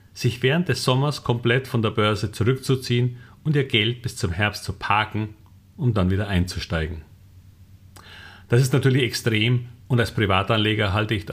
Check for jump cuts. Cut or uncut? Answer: uncut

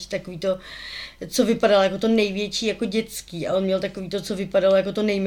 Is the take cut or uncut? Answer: uncut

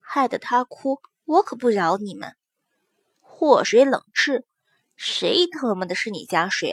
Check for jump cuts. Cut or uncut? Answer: uncut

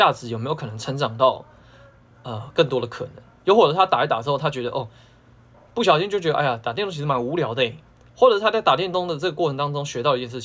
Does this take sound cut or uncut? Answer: uncut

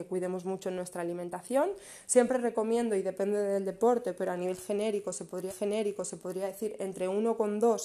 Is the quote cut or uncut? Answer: cut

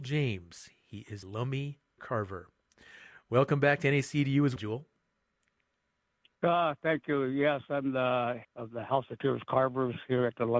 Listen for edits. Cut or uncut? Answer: cut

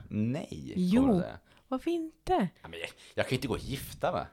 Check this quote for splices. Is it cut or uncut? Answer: uncut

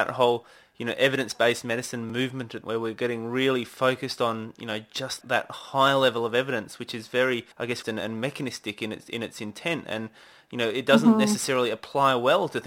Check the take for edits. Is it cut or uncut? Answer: cut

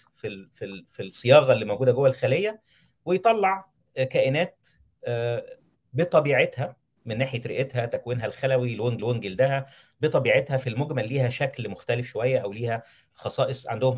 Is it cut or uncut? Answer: cut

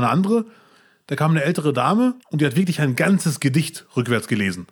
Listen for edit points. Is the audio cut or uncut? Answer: cut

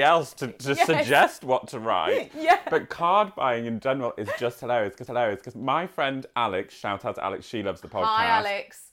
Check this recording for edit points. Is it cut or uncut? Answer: cut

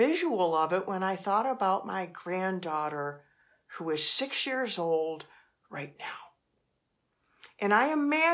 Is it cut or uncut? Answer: uncut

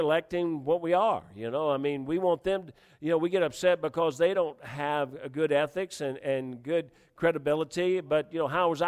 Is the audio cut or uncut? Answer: uncut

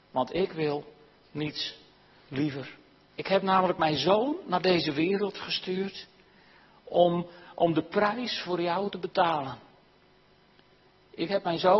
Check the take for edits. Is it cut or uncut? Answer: uncut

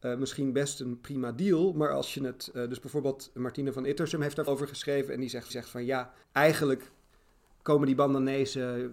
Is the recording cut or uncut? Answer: cut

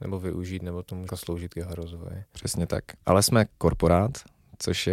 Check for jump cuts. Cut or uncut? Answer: cut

